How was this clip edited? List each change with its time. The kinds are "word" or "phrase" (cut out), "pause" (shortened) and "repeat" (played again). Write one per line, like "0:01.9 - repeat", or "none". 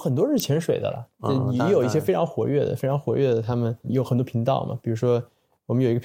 0:03.8 - word